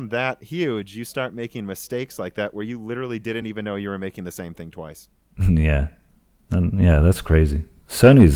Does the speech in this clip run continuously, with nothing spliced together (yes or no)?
yes